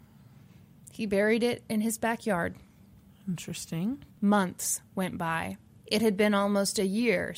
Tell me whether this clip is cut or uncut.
cut